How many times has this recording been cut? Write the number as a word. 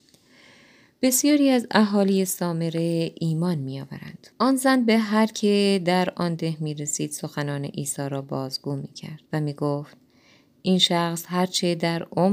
two